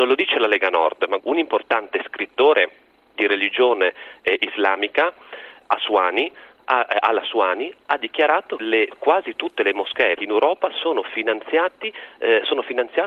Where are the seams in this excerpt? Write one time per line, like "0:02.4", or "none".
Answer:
0:01.2
0:03.2
0:05.6
0:08.6
0:10.2

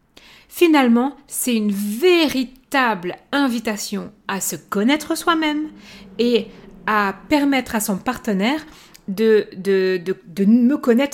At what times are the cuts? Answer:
none

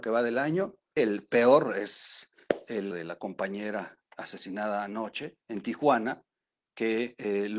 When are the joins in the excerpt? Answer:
0:01.0
0:02.9
0:04.1
0:05.4

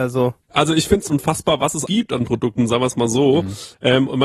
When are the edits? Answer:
0:01.1
0:01.9

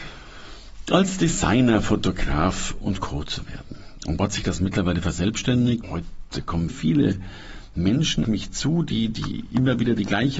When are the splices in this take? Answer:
0:02.8
0:04.2
0:05.8
0:06.7
0:08.2

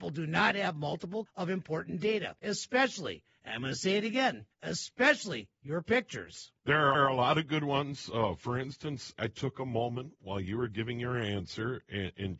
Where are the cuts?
0:01.3
0:02.4
0:04.5
0:06.6
0:06.9
0:09.2

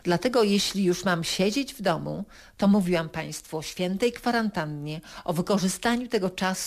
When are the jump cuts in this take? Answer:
none

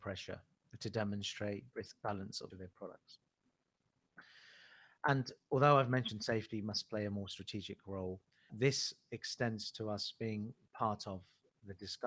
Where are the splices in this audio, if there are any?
0:01.7
0:02.5
0:08.5

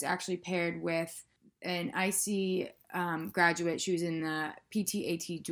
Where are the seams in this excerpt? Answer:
none

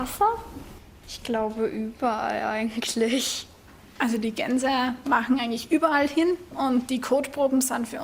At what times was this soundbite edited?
none

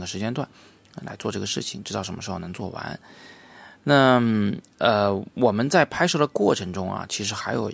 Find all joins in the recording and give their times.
0:04.7

